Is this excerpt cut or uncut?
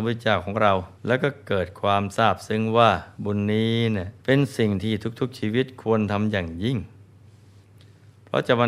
cut